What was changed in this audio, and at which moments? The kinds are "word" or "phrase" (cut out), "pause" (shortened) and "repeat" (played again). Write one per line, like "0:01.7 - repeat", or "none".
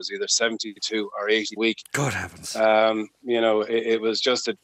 0:01.6 - phrase